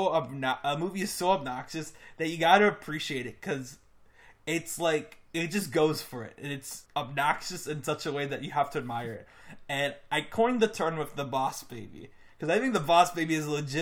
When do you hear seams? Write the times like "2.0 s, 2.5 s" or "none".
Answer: 6.9 s